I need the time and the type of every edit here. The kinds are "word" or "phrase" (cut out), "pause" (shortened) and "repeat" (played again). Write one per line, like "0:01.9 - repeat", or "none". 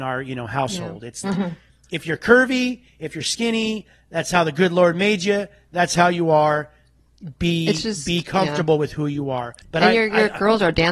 0:01.2 - word
0:09.6 - pause

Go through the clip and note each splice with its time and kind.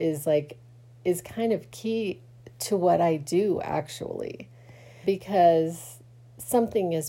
0:05.0 - word

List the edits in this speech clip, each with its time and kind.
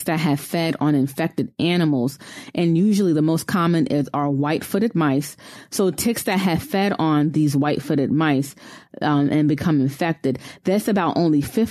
none

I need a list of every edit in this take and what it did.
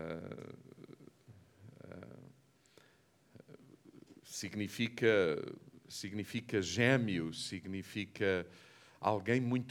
0:04.2 - pause

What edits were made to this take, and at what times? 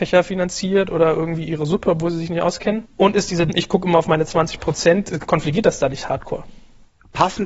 0:03.5 - phrase

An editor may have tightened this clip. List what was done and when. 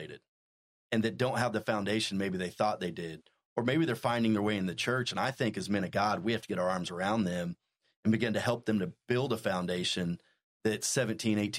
none

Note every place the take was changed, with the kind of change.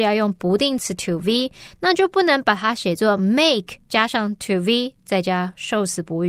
none

